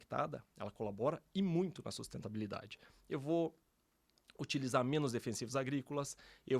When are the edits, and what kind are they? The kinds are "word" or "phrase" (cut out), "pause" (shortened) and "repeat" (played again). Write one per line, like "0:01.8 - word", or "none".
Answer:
none